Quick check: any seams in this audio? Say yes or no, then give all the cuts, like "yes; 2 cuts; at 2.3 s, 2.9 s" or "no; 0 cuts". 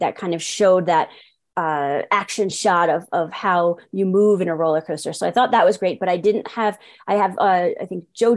no; 0 cuts